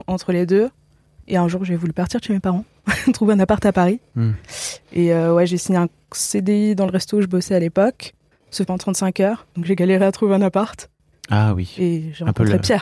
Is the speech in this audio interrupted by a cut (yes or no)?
yes